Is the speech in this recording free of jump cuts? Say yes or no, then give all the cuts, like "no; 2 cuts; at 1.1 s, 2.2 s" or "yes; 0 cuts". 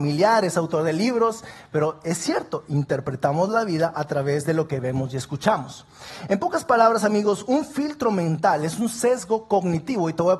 yes; 0 cuts